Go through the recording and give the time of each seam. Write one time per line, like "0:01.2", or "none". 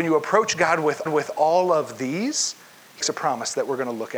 0:01.1
0:03.0